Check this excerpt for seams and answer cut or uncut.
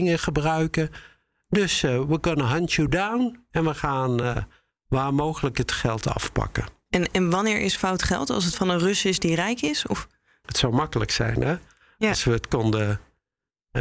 uncut